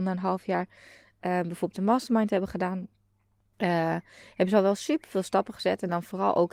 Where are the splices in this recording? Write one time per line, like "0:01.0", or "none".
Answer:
0:01.7